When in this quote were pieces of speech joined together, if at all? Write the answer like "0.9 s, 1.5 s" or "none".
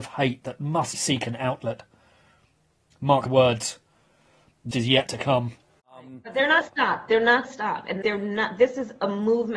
0.9 s, 3.3 s, 4.7 s, 6.6 s, 7.4 s, 8.0 s